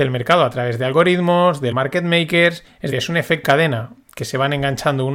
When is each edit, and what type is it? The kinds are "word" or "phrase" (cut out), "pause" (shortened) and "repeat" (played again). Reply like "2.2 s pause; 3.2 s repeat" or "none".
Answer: 1.7 s word; 2.9 s word; 3.4 s word